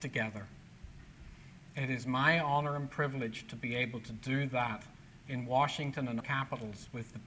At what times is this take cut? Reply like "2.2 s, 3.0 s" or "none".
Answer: 6.2 s